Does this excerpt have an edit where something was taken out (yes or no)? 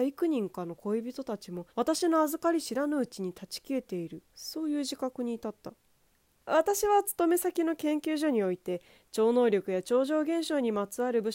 yes